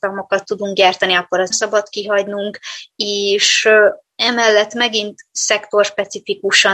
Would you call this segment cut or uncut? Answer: cut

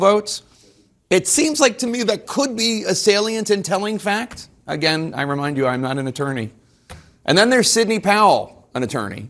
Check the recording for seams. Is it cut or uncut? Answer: uncut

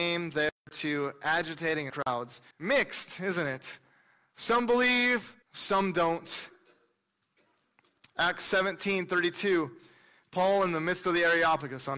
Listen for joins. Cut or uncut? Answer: cut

